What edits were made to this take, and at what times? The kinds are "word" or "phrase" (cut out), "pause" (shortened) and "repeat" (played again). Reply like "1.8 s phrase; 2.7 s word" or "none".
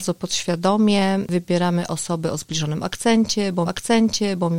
3.6 s repeat